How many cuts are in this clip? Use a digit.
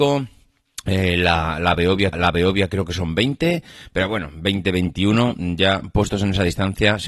1